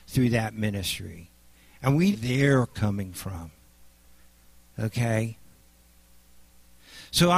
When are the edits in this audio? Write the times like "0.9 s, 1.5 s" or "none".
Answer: 2.1 s